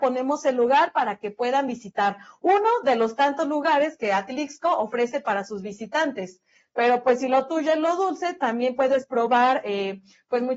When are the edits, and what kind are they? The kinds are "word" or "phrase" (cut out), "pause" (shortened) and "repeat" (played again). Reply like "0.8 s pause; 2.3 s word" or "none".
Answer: none